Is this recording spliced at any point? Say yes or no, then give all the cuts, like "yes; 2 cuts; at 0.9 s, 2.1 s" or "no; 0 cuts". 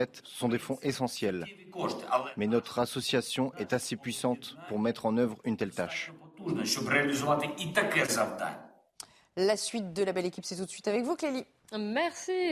no; 0 cuts